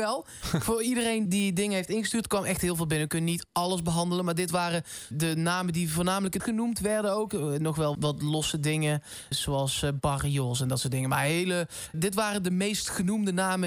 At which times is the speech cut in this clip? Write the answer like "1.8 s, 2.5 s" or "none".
1.3 s, 5.1 s, 6.4 s, 7.9 s, 9.3 s, 11.9 s